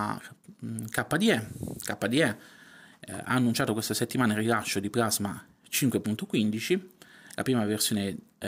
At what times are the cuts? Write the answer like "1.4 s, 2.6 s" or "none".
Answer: none